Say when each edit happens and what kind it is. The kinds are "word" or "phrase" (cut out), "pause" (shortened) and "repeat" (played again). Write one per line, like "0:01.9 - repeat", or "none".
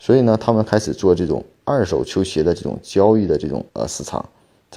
0:03.7 - pause